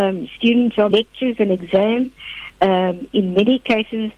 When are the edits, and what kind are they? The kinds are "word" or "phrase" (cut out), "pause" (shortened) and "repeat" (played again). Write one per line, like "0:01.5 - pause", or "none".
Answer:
0:00.9 - word
0:02.5 - pause